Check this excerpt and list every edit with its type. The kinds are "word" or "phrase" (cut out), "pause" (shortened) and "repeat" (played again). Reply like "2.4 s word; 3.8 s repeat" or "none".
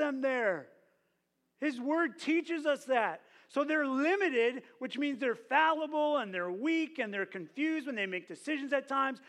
none